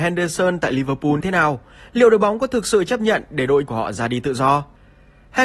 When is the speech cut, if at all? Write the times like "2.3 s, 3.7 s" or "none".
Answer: 1.2 s, 3.7 s